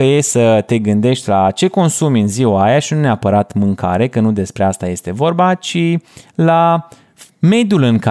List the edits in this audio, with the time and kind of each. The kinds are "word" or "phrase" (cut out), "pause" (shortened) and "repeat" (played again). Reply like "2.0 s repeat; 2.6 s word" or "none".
none